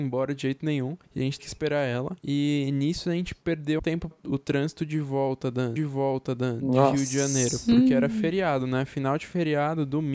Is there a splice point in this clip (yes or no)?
yes